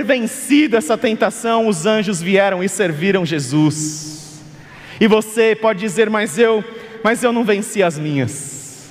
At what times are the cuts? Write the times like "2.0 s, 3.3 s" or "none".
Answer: none